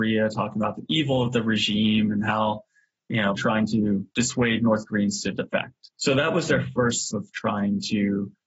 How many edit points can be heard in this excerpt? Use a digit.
4